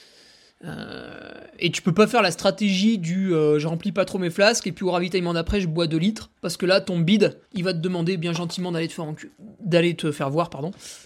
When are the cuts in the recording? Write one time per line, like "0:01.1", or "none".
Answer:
0:06.4
0:07.5